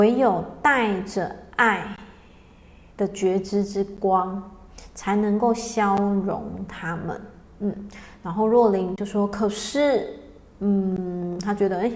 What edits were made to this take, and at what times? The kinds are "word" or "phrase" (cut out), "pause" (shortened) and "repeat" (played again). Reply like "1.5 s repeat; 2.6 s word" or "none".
none